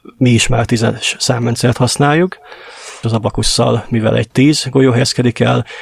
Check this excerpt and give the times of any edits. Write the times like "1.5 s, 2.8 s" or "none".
3.0 s, 4.3 s